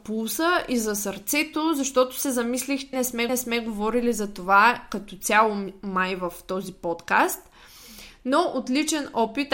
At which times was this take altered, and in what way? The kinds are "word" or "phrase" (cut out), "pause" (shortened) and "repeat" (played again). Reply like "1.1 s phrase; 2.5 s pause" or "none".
2.9 s word; 3.3 s repeat